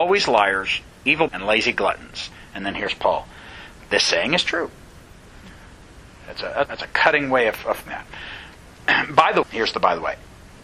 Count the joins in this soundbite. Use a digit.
4